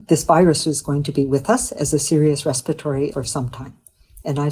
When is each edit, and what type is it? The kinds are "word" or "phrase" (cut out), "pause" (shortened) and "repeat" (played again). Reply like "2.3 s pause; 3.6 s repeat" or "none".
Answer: 3.1 s word